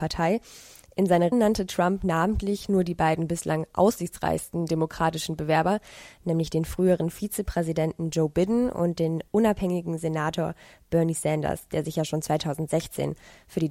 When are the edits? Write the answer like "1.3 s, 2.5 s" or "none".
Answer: 1.3 s

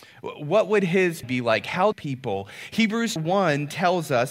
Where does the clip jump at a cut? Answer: 1.2 s, 1.9 s, 3.2 s

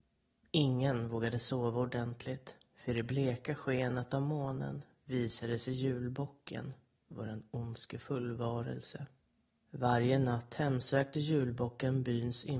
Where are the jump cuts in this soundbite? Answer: 9.2 s

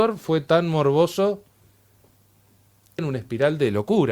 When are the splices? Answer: 3.0 s

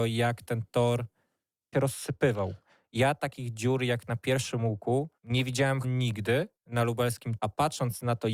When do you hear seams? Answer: 1.7 s, 5.2 s, 5.8 s, 6.6 s, 7.4 s

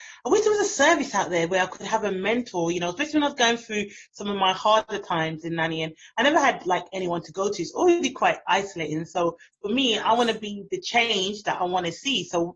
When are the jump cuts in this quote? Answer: none

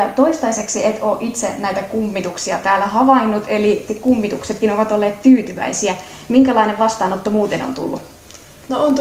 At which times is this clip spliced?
3.9 s

